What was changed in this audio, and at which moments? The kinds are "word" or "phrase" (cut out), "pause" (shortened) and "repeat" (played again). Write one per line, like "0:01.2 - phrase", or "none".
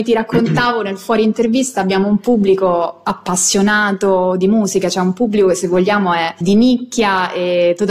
0:06.4 - word